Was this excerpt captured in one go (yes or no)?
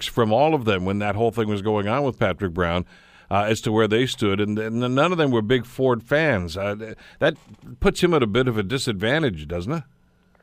yes